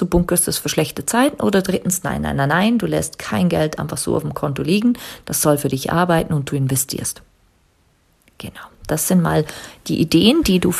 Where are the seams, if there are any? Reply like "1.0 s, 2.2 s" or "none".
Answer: none